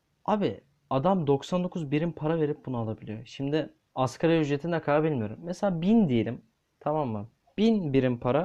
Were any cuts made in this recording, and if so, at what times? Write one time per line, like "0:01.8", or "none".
0:03.8

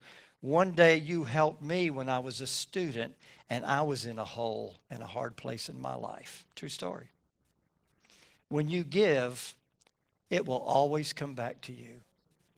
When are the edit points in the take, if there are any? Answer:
0:06.5

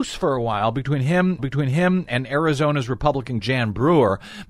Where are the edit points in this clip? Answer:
0:01.4
0:03.4

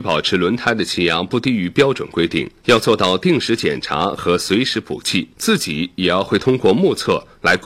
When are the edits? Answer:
0:02.6
0:05.3

